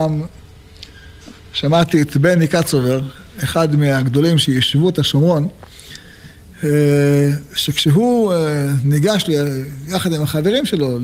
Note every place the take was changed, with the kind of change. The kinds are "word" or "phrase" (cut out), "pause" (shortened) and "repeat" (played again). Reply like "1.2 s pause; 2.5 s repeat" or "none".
none